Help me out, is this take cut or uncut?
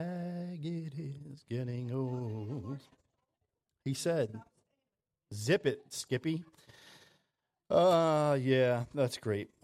uncut